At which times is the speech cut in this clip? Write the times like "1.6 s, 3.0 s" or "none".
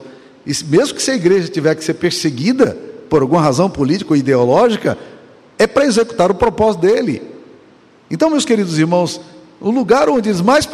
none